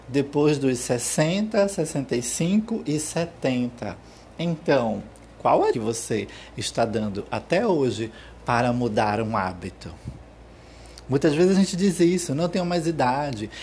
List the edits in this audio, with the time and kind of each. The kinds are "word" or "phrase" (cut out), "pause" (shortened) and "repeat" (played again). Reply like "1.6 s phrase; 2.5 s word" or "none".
5.7 s phrase